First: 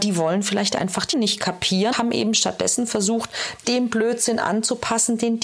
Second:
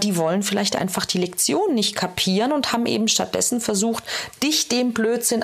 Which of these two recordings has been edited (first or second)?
first